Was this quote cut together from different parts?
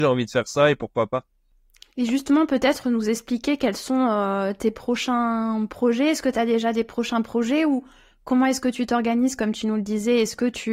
no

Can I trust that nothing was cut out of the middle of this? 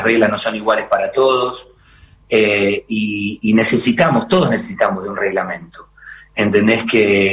yes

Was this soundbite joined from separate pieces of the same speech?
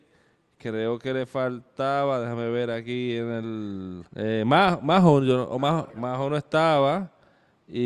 yes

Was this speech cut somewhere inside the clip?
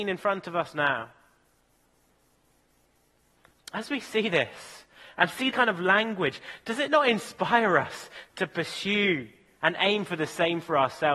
yes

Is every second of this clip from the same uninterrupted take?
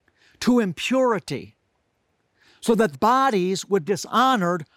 no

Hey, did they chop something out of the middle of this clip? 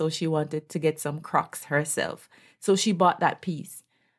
no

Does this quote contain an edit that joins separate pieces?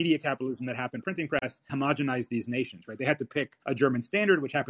yes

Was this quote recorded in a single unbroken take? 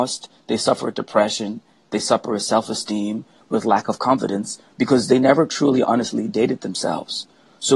yes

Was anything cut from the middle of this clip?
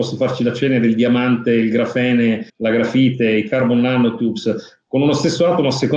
yes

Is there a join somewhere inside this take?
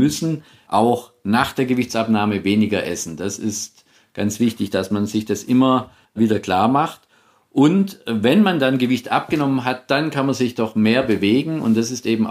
no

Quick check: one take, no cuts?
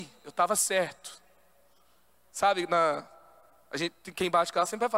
yes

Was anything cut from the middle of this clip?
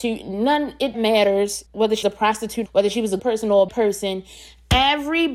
yes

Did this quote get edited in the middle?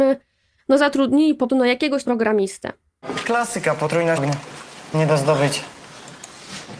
yes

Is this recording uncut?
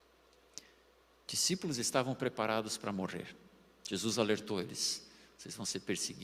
yes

